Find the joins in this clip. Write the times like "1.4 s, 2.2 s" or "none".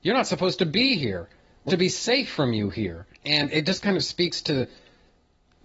1.7 s, 3.1 s